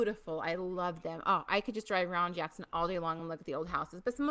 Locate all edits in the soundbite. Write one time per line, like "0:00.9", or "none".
none